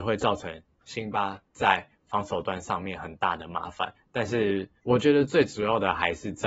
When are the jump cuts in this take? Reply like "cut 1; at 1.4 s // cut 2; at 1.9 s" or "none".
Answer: cut 1; at 1.5 s // cut 2; at 4.8 s